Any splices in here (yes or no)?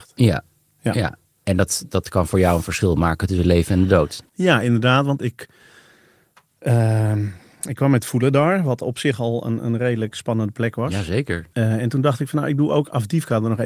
yes